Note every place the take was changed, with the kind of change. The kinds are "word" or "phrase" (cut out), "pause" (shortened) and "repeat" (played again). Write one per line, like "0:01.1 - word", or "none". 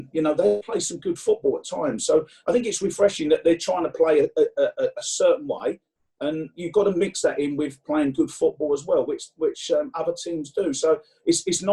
none